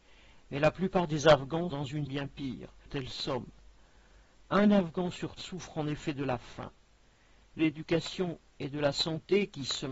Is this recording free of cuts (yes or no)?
no